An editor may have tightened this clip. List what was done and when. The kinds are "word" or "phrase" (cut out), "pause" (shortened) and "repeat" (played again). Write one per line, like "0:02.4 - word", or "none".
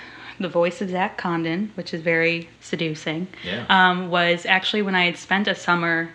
0:02.6 - pause